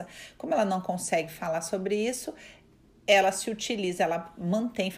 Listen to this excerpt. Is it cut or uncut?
uncut